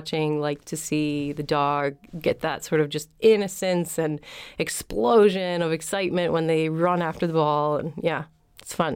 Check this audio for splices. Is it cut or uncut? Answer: uncut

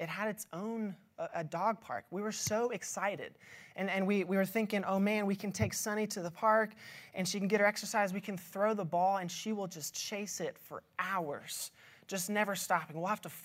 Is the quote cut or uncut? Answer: uncut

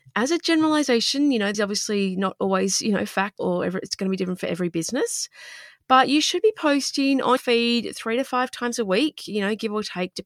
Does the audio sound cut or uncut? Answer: cut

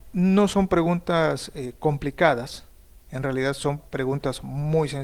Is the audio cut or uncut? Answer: uncut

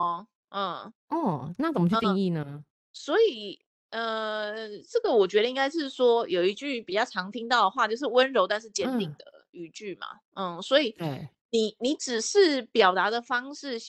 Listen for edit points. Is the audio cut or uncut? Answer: uncut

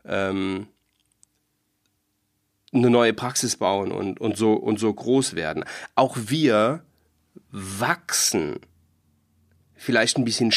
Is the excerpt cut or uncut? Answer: uncut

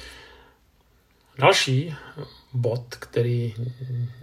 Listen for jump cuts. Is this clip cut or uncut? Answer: uncut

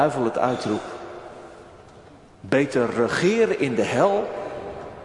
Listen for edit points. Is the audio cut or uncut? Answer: uncut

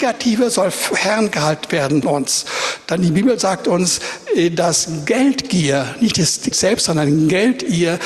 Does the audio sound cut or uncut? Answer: cut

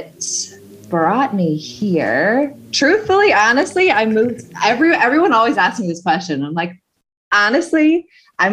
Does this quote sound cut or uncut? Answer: uncut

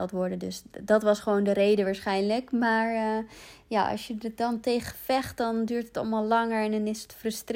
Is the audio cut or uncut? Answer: uncut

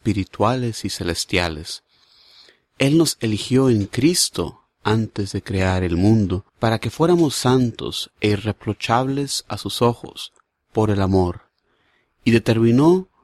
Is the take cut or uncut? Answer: cut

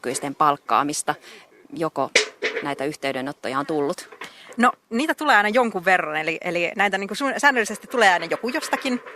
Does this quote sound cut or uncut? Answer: uncut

